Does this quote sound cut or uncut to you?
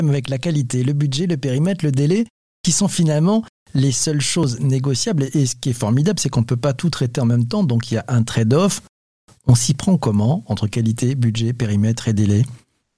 uncut